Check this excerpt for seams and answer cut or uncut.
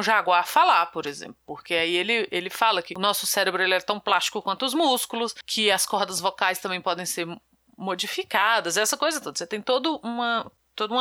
uncut